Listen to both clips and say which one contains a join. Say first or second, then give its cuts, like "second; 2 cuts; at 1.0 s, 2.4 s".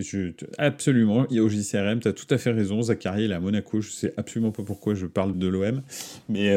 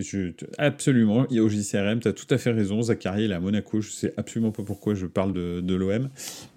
first; 1 cut; at 5.3 s